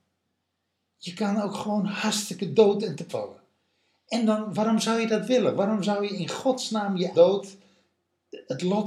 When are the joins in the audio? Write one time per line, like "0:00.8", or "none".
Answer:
0:03.1
0:07.1